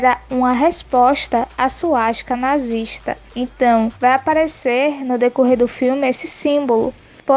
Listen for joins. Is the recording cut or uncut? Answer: cut